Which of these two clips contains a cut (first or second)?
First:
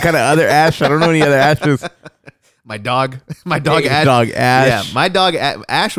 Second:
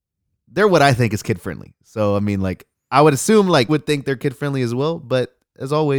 second